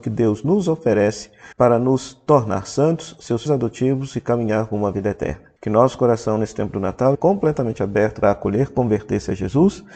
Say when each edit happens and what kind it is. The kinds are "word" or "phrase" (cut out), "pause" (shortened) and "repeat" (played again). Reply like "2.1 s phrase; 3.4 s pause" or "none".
1.5 s pause; 3.5 s word; 5.6 s pause; 7.1 s word; 8.2 s word